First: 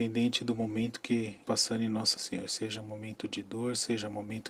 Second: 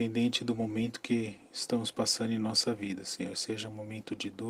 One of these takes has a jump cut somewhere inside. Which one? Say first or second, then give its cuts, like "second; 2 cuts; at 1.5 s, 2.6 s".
first; 2 cuts; at 1.4 s, 2.2 s